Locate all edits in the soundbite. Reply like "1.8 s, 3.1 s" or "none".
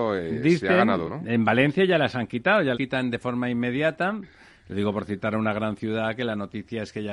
1.0 s, 2.7 s